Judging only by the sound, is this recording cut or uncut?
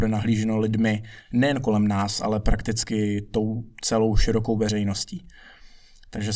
uncut